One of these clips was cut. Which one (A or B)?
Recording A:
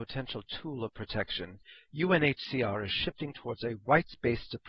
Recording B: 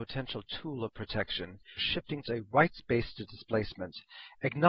B